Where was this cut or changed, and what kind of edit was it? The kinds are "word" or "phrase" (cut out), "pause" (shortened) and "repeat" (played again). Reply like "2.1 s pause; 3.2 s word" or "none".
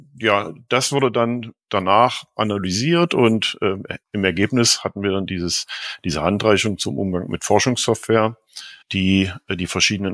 4.0 s pause; 8.8 s pause